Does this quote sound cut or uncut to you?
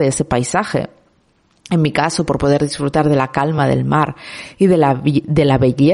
uncut